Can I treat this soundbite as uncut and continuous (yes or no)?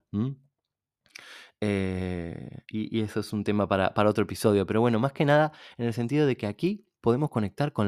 no